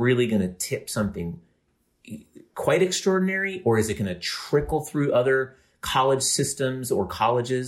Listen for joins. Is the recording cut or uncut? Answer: uncut